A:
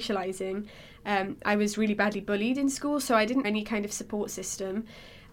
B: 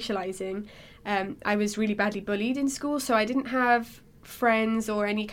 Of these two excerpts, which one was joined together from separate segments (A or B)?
A